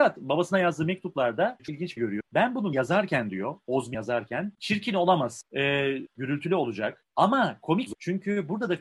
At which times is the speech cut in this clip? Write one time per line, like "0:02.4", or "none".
0:01.6
0:02.0
0:02.7
0:06.1
0:07.9